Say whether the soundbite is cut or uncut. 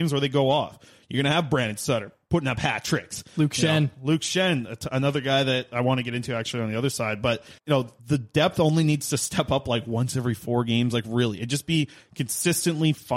cut